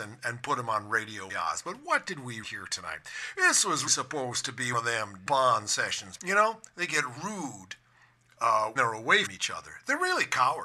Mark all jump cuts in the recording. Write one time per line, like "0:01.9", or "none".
0:01.3
0:02.4
0:03.9
0:04.7
0:05.3
0:06.2
0:07.2
0:08.8
0:09.3